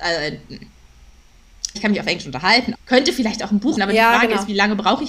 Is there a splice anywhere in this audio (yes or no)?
yes